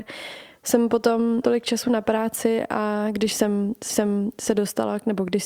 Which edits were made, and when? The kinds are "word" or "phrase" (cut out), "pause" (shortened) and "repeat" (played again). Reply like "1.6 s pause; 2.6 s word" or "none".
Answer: 1.4 s word; 3.9 s repeat

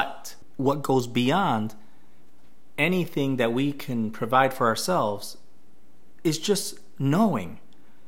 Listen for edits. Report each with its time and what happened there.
none

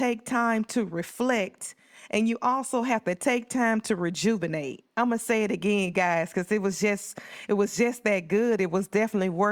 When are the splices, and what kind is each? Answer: none

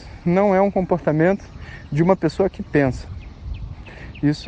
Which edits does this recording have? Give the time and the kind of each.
none

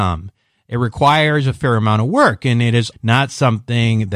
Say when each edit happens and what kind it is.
2.9 s word

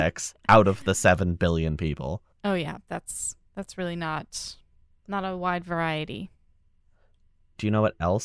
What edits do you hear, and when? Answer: 2.3 s pause; 3.5 s pause; 4.9 s pause

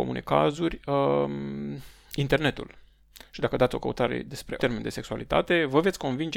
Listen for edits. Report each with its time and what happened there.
4.6 s word

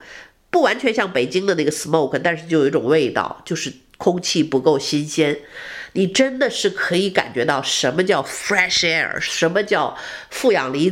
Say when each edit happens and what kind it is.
none

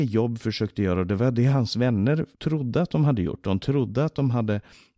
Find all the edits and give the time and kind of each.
2.3 s pause

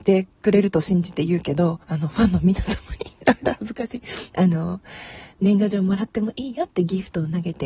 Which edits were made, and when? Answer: 1.8 s pause

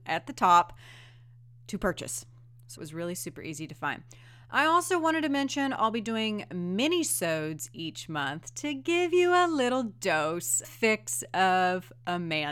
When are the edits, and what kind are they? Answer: 2.8 s phrase; 10.6 s phrase

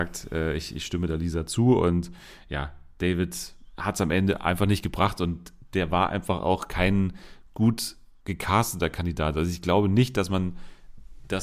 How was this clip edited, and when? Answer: none

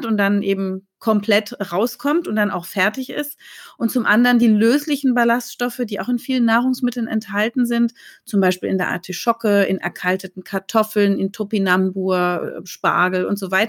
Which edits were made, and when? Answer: none

